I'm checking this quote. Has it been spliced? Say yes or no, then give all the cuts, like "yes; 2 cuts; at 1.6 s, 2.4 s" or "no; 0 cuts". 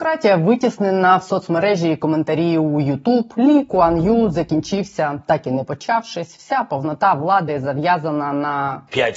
no; 0 cuts